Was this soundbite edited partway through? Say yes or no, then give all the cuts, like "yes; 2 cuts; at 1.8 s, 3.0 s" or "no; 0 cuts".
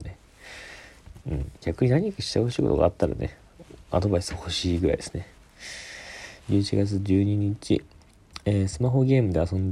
yes; 3 cuts; at 1.2 s, 1.6 s, 6.4 s